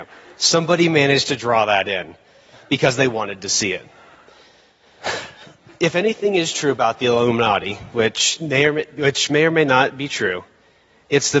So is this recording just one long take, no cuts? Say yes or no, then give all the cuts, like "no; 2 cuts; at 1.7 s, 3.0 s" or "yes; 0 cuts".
yes; 0 cuts